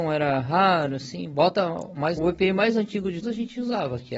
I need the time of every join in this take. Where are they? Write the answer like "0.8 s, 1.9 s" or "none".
2.2 s, 3.2 s